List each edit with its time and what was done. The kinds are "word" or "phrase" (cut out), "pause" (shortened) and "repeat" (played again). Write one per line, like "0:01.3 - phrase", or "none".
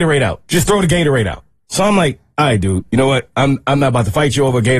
none